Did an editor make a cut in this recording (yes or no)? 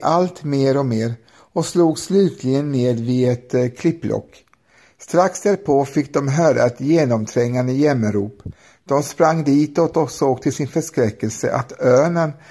no